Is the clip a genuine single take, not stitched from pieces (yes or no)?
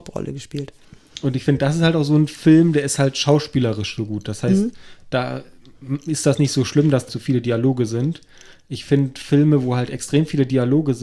no